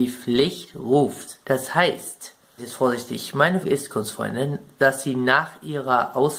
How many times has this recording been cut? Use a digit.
3